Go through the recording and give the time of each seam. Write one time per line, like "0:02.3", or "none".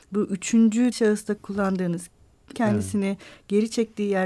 0:00.9
0:01.4
0:02.5

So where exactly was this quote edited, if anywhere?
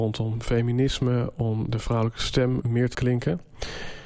0:01.7
0:02.6
0:02.9

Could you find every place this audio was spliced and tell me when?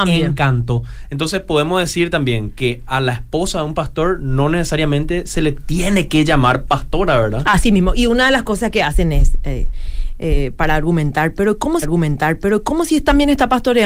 0:11.8

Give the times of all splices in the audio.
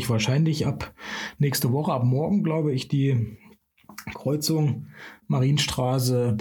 none

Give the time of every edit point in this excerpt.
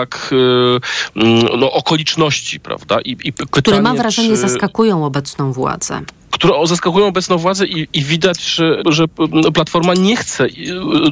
0:08.8

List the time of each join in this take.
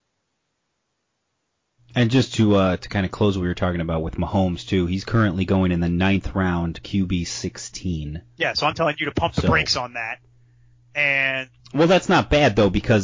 0:11.6

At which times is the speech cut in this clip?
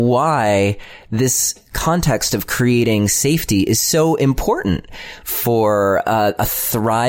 none

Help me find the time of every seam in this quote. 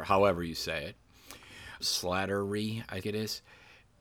0:01.8
0:03.0

